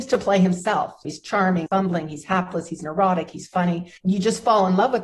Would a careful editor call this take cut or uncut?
cut